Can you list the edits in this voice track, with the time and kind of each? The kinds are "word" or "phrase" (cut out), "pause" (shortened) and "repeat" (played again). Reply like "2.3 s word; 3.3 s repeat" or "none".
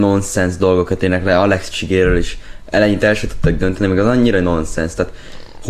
none